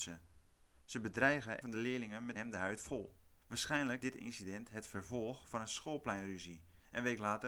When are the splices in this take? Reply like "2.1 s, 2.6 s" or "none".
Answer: 1.6 s, 2.3 s, 4.0 s